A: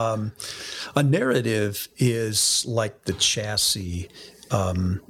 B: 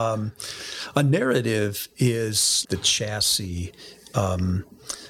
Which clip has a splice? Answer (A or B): B